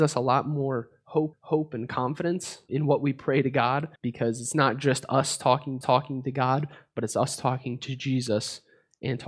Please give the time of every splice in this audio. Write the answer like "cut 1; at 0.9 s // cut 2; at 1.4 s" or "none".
cut 1; at 1.3 s // cut 2; at 2.7 s // cut 3; at 4.0 s // cut 4; at 5.8 s